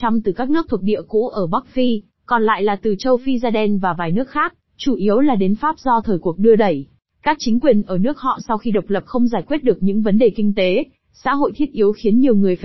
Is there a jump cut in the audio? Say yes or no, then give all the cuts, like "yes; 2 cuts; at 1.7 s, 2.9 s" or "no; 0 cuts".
no; 0 cuts